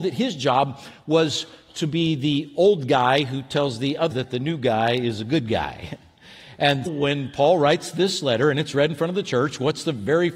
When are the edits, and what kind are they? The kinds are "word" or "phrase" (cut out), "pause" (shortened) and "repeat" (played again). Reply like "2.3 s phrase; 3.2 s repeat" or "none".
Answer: 4.1 s word; 6.9 s word